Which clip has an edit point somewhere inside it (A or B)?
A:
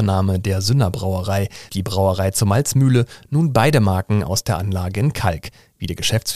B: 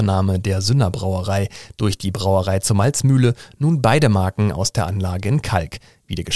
A